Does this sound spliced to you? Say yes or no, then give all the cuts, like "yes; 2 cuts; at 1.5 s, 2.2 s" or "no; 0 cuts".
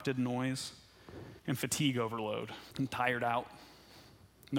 yes; 2 cuts; at 1.4 s, 2.7 s